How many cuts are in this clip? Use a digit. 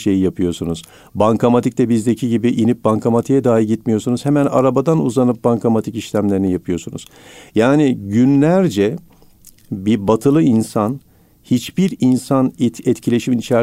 0